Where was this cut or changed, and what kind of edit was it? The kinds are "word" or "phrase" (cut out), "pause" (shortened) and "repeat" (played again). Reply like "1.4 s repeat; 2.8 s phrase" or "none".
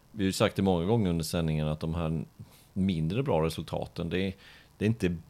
none